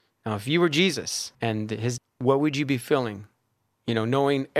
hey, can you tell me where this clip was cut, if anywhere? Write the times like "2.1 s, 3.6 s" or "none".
1.3 s, 2.0 s